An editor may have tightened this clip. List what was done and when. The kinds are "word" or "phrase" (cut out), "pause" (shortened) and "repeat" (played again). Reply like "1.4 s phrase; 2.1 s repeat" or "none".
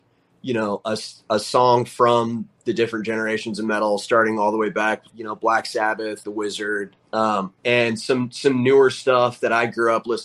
5.1 s word; 6.2 s word; 7.6 s pause